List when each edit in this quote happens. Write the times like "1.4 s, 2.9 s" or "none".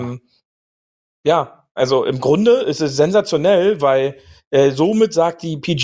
none